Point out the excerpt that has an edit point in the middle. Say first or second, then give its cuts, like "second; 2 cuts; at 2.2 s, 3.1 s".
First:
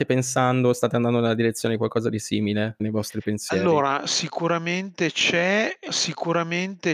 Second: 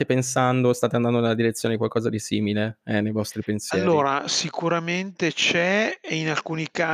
first; 2 cuts; at 2.8 s, 5.9 s